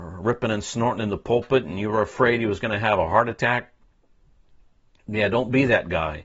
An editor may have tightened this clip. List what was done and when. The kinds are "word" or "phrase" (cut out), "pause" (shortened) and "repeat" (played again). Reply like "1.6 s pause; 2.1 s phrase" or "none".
none